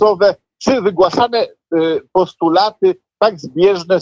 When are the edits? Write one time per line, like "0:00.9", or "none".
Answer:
none